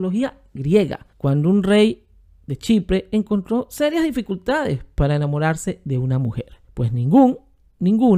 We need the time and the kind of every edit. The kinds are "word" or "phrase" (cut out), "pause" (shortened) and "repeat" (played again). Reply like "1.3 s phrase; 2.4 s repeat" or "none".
1.1 s pause; 6.6 s pause